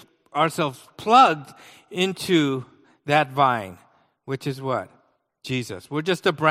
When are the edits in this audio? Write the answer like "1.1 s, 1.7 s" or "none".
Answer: none